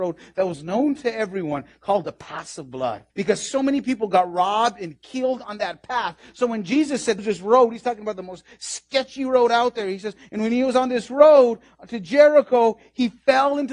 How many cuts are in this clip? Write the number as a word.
two